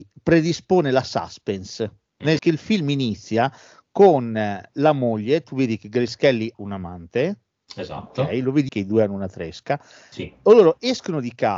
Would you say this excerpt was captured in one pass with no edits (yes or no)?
no